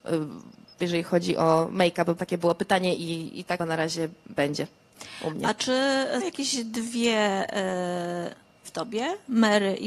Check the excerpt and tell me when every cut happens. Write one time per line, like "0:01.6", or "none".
0:02.2
0:03.0
0:03.6
0:06.2
0:08.6